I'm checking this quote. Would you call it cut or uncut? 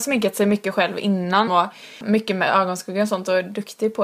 cut